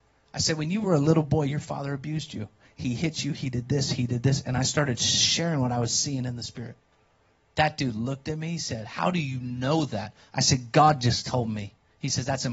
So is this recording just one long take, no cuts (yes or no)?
yes